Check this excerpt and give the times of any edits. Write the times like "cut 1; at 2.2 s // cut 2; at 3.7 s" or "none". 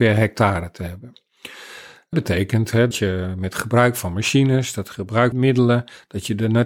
cut 1; at 2.1 s // cut 2; at 2.9 s // cut 3; at 5.3 s